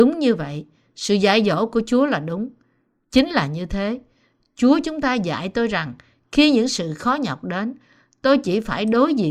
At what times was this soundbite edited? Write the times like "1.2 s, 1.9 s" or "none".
none